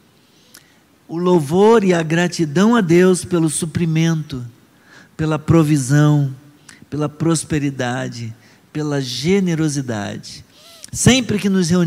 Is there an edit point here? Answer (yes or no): no